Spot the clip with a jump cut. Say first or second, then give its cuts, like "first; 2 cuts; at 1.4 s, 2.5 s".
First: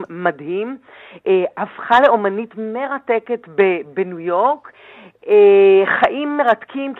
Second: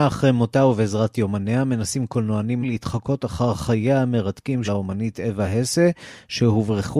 second; 2 cuts; at 2.6 s, 4.6 s